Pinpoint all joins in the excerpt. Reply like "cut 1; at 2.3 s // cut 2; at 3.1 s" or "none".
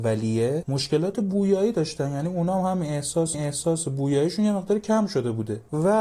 cut 1; at 3.3 s